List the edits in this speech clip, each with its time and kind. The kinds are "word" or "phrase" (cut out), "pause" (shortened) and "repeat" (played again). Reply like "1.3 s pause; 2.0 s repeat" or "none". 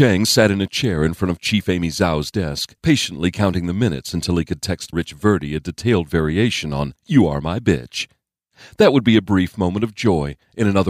2.8 s pause; 4.9 s word; 7.0 s pause